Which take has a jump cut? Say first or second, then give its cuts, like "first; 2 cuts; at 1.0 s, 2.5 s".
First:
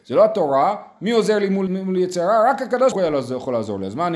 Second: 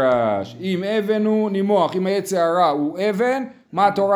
first; 3 cuts; at 1.0 s, 1.7 s, 2.9 s